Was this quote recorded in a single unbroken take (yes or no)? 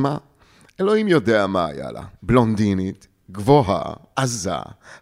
yes